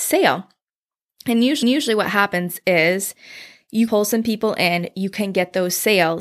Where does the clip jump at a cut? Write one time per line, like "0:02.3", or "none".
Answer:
0:01.6
0:03.9